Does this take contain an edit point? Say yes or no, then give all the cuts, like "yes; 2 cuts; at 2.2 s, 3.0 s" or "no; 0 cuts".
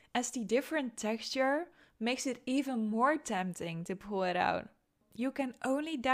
no; 0 cuts